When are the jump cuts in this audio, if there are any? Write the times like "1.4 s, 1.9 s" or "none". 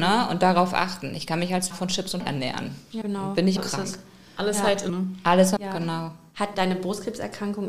1.7 s, 2.2 s, 3.0 s, 3.6 s, 4.9 s, 5.6 s, 6.5 s